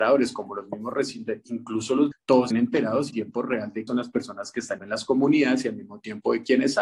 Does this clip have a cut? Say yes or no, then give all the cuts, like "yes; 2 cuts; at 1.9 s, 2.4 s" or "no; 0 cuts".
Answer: yes; 6 cuts; at 1.4 s, 2.1 s, 2.5 s, 3.1 s, 3.9 s, 4.8 s